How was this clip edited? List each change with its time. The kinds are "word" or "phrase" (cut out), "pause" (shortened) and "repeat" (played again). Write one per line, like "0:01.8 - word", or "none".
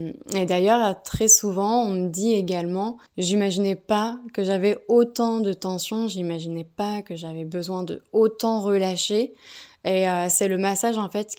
0:03.1 - pause

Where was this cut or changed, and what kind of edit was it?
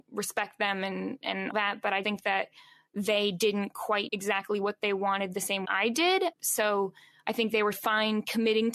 0:01.5 - word
0:02.0 - word
0:04.1 - word
0:05.6 - word
0:06.3 - word
0:07.7 - word

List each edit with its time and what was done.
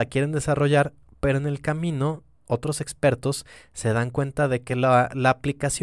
none

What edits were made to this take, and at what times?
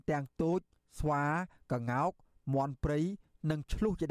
none

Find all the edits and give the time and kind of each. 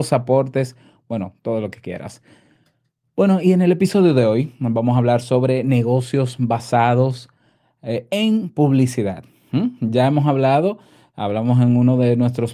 none

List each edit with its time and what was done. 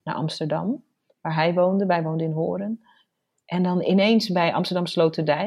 none

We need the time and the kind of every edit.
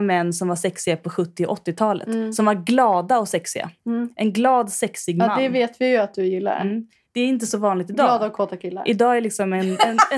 none

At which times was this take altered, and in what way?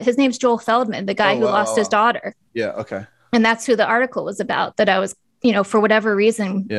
none

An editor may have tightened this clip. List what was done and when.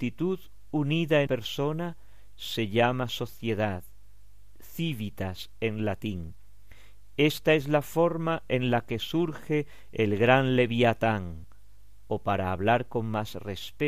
0:01.3 - word

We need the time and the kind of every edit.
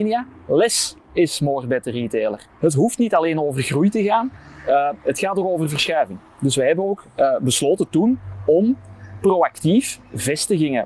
0:02.5 - pause

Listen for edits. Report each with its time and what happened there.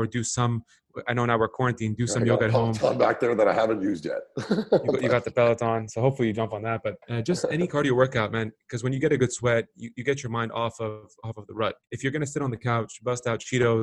0:07.0 - pause
0:11.8 - pause

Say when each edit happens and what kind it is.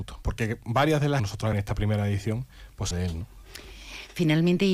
0:01.2 - phrase
0:01.5 - word
0:02.9 - word

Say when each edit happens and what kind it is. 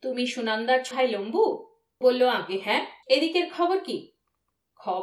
0:00.9 - word
0:02.0 - word
0:03.0 - pause

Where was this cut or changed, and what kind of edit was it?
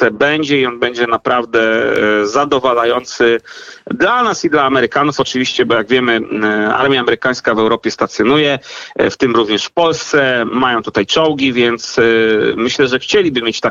none

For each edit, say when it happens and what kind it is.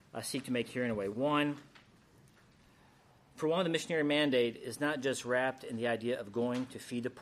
none

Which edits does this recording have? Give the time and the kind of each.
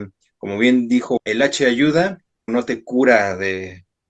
0:01.2 - word
0:02.5 - word

